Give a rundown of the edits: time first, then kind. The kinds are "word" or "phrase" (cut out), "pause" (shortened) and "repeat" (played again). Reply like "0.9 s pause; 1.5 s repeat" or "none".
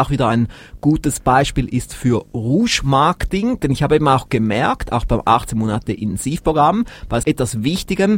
7.2 s word